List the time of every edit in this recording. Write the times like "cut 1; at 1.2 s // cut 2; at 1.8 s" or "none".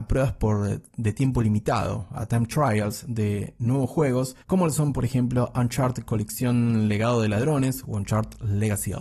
cut 1; at 4.4 s